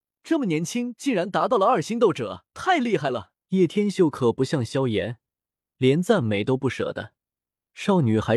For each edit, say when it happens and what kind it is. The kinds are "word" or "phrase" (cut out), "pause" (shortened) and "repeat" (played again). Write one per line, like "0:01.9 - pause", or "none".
0:02.5 - pause
0:03.4 - pause